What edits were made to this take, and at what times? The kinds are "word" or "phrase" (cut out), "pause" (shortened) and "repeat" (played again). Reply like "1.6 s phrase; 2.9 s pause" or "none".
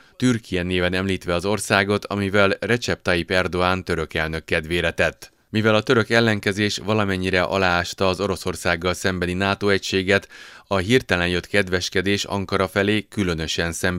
none